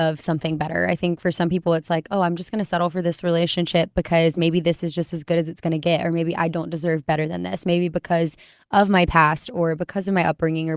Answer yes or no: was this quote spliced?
no